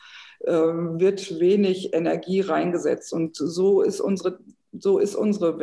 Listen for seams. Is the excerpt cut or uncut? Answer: uncut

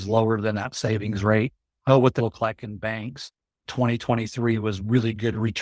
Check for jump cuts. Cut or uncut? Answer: cut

